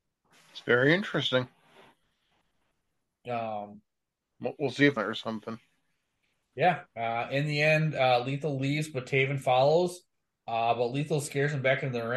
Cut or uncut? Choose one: cut